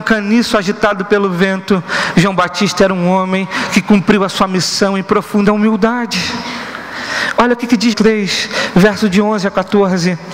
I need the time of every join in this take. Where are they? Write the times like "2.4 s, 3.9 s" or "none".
7.9 s